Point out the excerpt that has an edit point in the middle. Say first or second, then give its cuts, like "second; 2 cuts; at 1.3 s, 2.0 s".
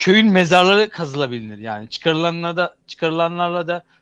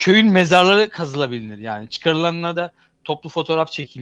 second; 1 cut; at 2.5 s